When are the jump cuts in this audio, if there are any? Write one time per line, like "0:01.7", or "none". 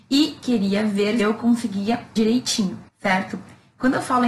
0:01.2
0:02.2
0:02.9